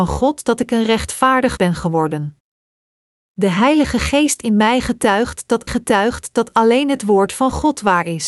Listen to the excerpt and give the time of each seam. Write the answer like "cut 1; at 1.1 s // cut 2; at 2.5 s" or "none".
cut 1; at 1.6 s // cut 2; at 5.7 s